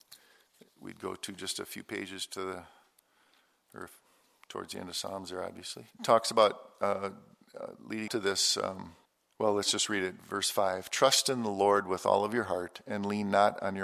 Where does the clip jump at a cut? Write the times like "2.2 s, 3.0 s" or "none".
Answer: 5.9 s, 8.1 s, 9.0 s